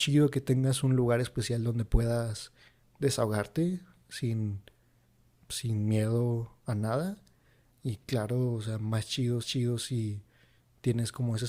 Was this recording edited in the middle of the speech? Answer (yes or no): yes